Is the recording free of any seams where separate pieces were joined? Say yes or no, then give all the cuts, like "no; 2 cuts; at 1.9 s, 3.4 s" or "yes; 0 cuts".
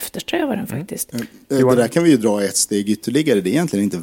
yes; 0 cuts